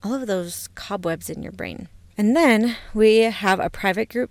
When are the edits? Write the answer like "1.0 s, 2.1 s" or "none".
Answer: 2.1 s